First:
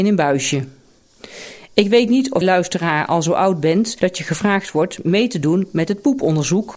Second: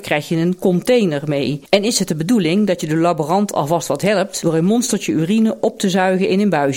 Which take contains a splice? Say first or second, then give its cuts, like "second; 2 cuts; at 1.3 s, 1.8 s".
first; 1 cut; at 2.4 s